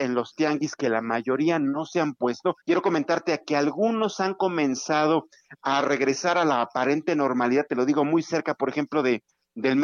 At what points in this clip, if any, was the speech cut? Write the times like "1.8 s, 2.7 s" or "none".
2.6 s

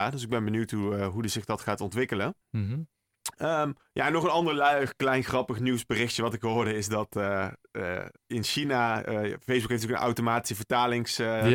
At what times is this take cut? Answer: 2.4 s, 3.8 s, 8.2 s

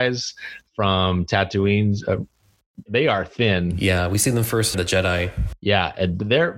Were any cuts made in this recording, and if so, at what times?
2.9 s, 4.7 s

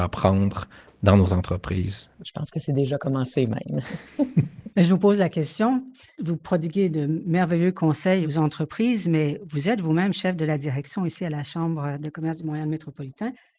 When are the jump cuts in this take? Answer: none

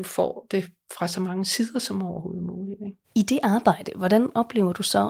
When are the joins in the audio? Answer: 3.0 s

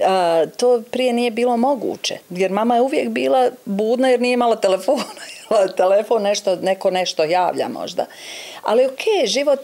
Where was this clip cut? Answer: 2.2 s

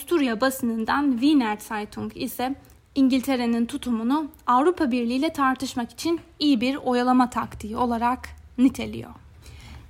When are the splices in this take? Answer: none

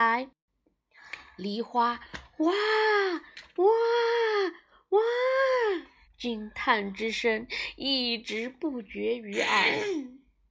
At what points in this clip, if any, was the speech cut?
6.0 s

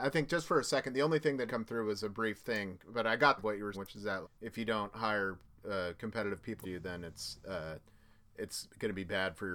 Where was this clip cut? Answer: 1.5 s, 3.4 s, 3.7 s, 4.2 s, 6.6 s

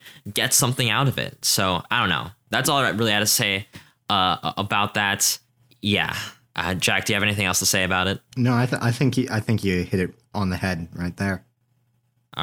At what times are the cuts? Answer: 5.5 s

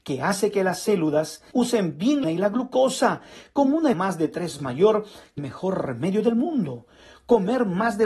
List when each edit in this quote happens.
1.5 s, 2.2 s, 3.9 s, 4.6 s, 5.4 s

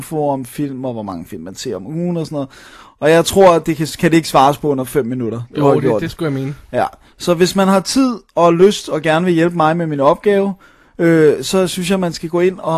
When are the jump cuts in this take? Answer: none

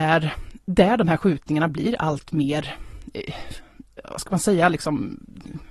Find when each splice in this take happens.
none

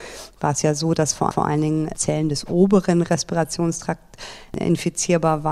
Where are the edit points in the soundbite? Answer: 1.3 s

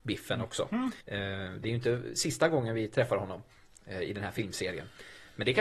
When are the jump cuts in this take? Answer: 1.0 s

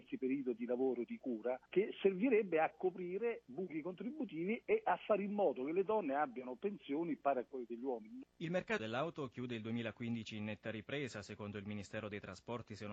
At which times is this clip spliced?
8.3 s, 8.8 s

